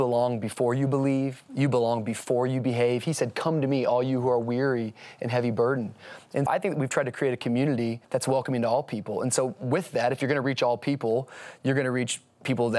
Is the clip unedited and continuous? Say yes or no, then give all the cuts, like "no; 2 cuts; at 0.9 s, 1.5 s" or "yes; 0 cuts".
no; 2 cuts; at 6.5 s, 8.0 s